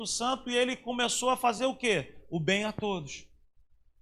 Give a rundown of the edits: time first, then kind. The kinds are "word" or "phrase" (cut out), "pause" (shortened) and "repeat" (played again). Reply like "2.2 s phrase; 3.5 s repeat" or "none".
none